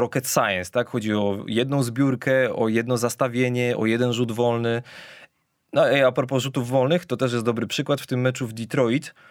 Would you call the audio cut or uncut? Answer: uncut